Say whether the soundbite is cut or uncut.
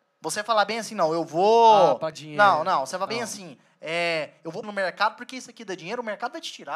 cut